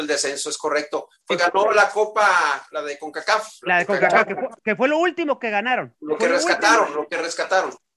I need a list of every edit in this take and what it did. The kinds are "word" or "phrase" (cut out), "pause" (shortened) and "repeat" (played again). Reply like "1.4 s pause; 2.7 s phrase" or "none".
1.4 s word; 4.6 s pause

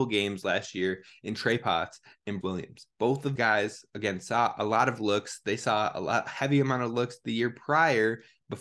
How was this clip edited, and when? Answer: 2.4 s word; 2.9 s pause; 3.4 s word

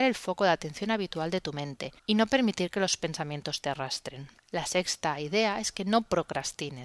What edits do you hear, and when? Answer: 2.0 s pause; 4.4 s pause

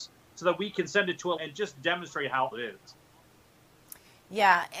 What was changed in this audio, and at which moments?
1.4 s word; 2.5 s word

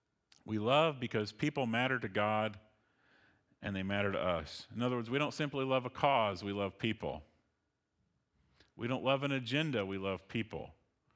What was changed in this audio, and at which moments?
none

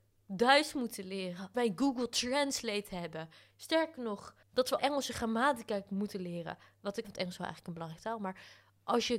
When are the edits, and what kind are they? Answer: 1.5 s word; 3.5 s pause; 4.4 s pause; 4.8 s word; 7.0 s phrase

